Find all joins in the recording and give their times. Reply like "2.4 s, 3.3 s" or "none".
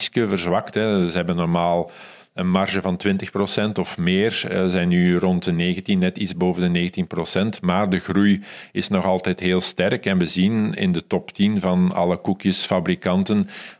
none